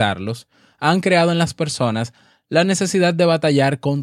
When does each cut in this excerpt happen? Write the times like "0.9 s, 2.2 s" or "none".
none